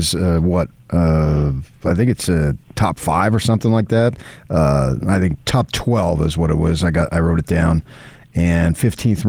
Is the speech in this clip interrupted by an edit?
yes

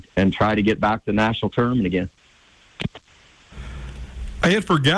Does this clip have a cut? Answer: no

